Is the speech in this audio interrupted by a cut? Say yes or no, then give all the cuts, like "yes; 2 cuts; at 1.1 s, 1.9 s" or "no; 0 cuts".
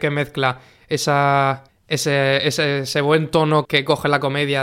yes; 2 cuts; at 1.7 s, 3.6 s